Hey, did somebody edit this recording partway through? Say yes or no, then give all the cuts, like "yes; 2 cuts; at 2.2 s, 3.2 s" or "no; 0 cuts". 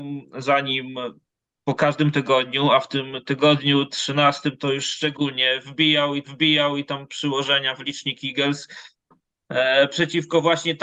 yes; 1 cut; at 6.2 s